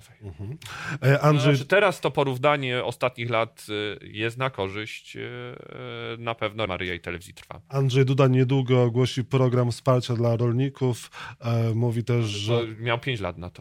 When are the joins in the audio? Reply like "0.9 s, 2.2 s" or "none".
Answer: 6.7 s